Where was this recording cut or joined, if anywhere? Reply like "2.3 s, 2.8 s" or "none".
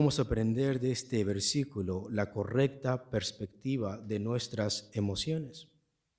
none